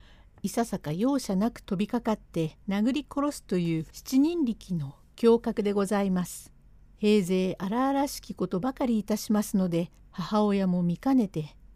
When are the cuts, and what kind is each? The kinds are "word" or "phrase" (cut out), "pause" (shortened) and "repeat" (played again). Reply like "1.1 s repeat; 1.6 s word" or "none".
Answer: 2.6 s pause; 3.9 s pause; 6.7 s pause; 10.0 s pause